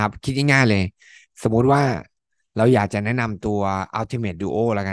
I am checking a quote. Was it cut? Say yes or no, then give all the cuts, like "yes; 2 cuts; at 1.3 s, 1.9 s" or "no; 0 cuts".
no; 0 cuts